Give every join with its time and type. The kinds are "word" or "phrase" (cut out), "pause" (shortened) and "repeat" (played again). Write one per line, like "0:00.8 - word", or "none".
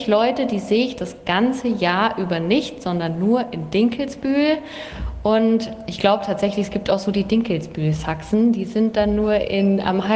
none

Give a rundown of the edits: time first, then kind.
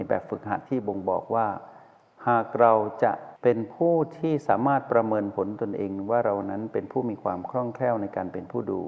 none

